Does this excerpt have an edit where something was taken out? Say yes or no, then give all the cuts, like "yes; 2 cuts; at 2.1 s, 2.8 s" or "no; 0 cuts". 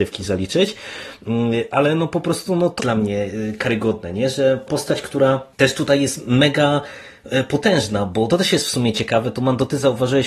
yes; 4 cuts; at 2.8 s, 4.7 s, 5.5 s, 8.3 s